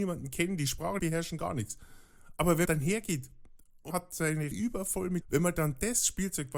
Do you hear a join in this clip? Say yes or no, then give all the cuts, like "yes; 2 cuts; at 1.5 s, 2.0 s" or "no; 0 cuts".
yes; 5 cuts; at 1.0 s, 2.7 s, 3.9 s, 4.5 s, 5.2 s